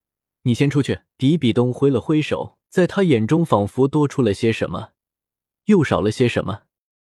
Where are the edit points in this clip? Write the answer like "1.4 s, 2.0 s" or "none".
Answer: 1.1 s, 2.6 s